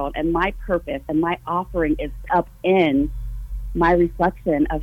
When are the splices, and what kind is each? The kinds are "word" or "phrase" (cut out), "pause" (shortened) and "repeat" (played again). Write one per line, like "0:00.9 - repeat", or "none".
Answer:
0:02.3 - word